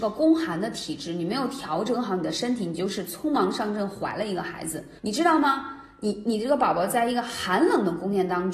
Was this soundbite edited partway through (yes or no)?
yes